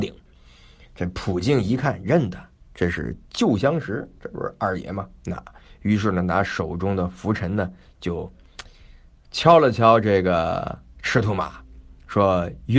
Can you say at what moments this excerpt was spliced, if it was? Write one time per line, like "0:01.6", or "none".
none